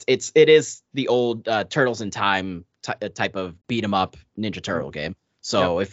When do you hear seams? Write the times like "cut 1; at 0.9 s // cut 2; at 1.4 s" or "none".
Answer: cut 1; at 3.6 s